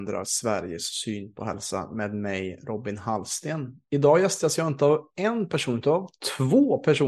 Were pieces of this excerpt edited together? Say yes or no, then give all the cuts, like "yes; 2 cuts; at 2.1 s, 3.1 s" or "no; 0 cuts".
no; 0 cuts